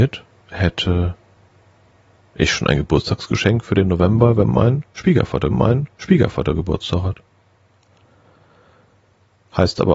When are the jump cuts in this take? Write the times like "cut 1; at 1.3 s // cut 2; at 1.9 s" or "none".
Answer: cut 1; at 5.5 s